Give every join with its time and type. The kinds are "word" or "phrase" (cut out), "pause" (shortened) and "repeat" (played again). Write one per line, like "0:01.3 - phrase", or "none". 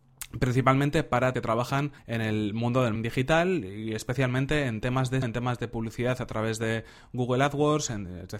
0:01.3 - phrase
0:02.0 - pause
0:03.0 - word
0:05.2 - word